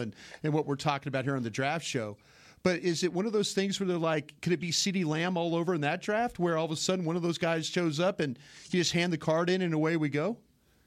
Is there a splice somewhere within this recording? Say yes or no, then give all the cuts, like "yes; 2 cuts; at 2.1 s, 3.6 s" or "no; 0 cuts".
no; 0 cuts